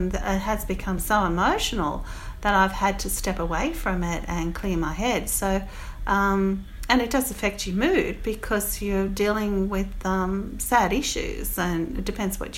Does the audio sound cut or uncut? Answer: uncut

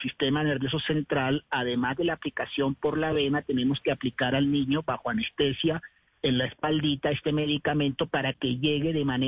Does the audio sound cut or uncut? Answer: uncut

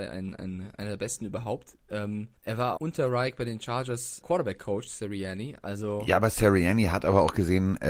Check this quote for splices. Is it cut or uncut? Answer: cut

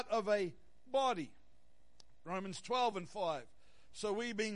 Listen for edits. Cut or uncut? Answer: uncut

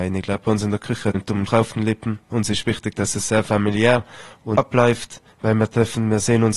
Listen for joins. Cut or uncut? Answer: cut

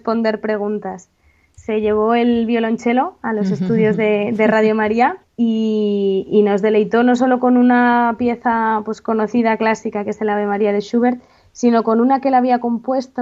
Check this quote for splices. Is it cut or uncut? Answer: cut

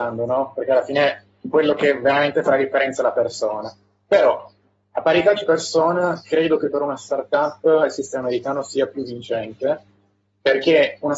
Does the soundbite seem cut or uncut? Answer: uncut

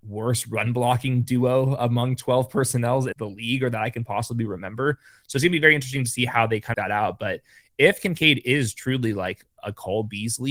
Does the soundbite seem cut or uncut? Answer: cut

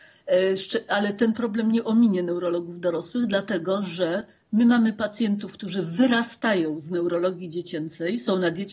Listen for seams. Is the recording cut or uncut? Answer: uncut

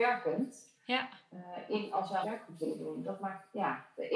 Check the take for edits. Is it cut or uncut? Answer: cut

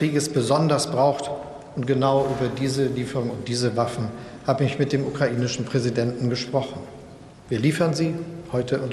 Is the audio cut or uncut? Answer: uncut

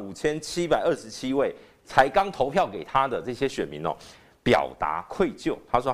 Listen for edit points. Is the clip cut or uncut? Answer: uncut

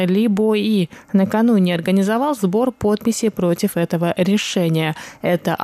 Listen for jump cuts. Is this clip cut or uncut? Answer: uncut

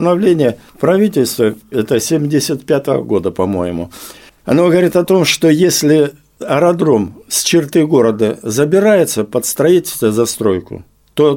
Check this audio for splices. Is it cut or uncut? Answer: uncut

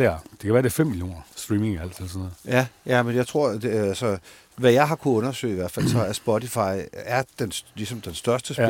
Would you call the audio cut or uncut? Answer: uncut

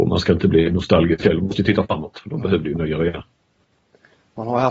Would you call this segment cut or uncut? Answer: uncut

